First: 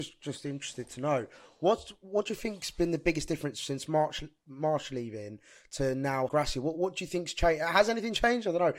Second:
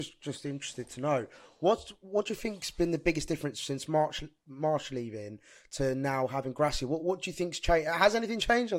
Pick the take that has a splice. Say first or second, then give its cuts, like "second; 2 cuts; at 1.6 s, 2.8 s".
first; 1 cut; at 6.3 s